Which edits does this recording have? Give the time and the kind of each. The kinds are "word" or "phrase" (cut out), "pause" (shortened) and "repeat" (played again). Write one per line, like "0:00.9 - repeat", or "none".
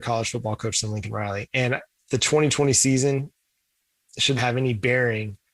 0:04.4 - word